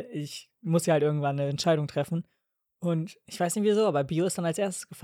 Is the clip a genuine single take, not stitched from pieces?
yes; 0 cuts

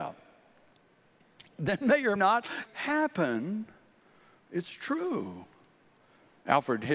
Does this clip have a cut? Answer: yes; 2 cuts; at 2.2 s, 2.7 s

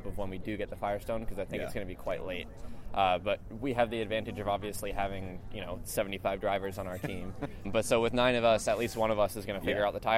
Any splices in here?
yes; 1 cut; at 7.6 s

